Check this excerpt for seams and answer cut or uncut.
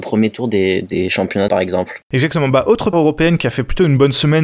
cut